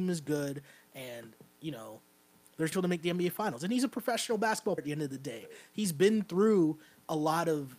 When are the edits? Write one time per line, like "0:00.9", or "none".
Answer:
0:02.7
0:04.8